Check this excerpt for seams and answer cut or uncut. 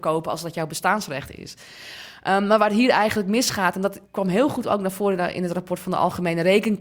cut